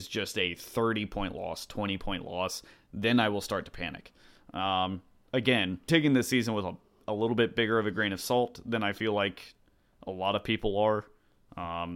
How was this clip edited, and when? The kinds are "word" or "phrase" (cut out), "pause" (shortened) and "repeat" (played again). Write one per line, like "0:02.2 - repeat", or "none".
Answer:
0:05.9 - word